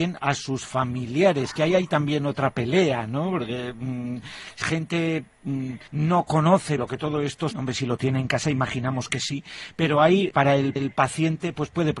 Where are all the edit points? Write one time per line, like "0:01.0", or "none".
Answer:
0:04.6
0:05.9
0:06.8
0:07.5
0:10.3
0:10.8